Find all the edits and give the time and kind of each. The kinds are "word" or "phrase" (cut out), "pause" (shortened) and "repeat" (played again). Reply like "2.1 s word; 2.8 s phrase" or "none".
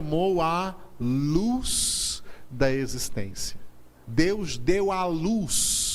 4.0 s pause